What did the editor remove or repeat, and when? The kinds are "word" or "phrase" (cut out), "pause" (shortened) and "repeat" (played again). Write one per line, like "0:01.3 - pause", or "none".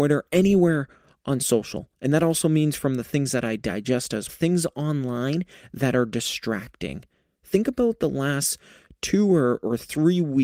0:04.3 - word